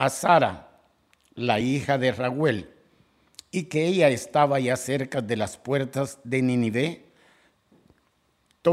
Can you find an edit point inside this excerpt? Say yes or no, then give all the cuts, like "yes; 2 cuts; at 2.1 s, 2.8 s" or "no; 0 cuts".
no; 0 cuts